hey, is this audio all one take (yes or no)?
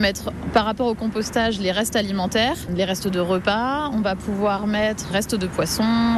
no